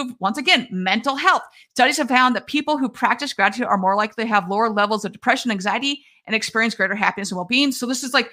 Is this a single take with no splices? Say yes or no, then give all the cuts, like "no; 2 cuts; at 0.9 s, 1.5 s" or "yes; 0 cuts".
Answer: yes; 0 cuts